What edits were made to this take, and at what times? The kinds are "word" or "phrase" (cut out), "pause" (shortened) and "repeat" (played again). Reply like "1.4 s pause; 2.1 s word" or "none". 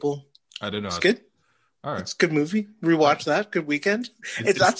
none